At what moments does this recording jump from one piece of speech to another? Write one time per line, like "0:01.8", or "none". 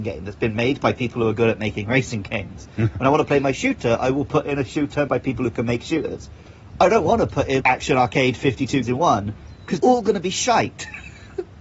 0:05.1
0:07.6
0:08.8
0:09.8